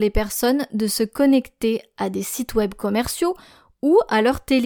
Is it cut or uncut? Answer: uncut